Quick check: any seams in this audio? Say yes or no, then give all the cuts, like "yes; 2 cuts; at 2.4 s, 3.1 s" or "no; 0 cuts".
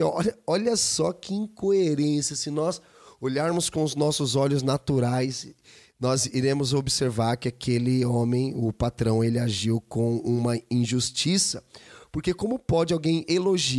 no; 0 cuts